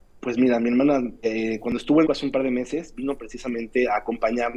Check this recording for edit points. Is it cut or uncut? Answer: cut